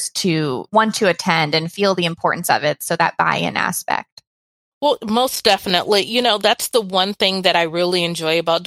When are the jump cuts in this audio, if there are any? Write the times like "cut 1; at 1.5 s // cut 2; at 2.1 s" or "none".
none